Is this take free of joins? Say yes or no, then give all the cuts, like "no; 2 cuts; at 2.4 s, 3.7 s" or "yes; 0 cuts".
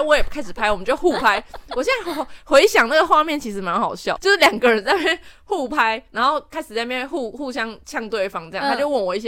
no; 1 cut; at 4.2 s